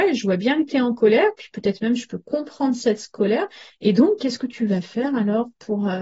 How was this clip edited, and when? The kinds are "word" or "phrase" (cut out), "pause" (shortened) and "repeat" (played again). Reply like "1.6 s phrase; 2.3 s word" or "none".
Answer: none